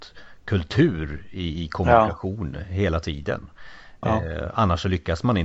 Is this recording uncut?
yes; 0 cuts

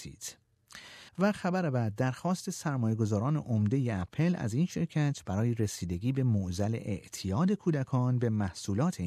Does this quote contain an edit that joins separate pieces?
yes; 1 cut; at 1.1 s

